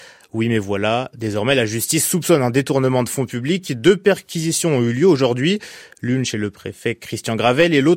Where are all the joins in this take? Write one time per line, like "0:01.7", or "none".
none